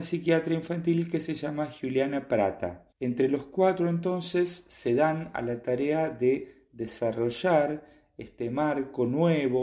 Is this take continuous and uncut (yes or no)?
no